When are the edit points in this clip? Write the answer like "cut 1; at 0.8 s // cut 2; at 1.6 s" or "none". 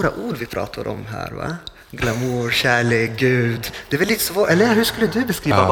none